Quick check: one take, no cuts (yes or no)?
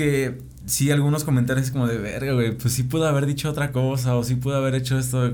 yes